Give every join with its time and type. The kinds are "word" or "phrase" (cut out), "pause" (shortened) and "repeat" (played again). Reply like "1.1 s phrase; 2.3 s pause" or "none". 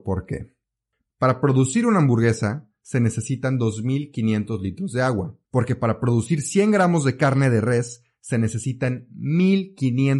5.4 s pause